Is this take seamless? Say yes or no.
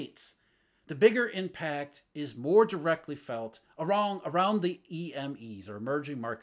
yes